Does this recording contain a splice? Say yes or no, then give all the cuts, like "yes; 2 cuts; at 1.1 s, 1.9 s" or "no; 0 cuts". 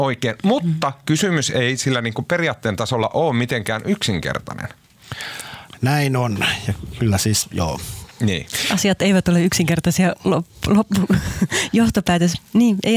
no; 0 cuts